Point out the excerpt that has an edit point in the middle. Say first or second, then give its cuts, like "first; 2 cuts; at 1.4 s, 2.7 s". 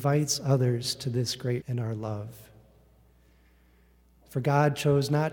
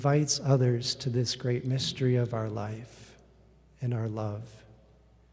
first; 1 cut; at 1.6 s